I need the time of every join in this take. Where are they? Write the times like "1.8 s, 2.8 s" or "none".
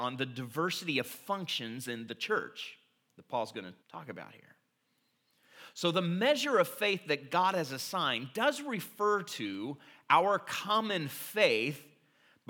3.8 s